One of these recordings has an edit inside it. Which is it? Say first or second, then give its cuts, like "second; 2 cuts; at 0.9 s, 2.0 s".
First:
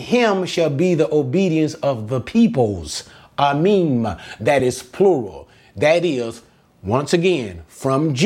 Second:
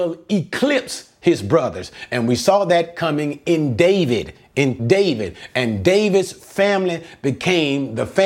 second; 1 cut; at 4.8 s